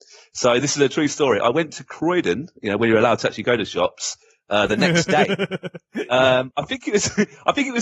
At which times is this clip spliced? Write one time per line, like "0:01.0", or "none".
none